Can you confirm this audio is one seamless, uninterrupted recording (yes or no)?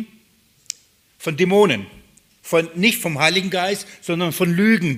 yes